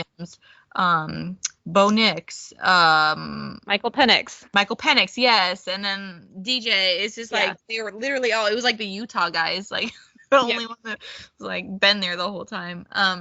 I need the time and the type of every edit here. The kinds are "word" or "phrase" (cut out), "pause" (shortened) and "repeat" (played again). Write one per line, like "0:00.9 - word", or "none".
0:01.6 - pause
0:04.5 - pause